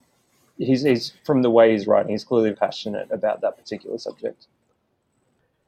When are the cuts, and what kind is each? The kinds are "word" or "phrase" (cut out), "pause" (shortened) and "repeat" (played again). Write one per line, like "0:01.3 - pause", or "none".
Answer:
0:01.2 - pause
0:02.5 - word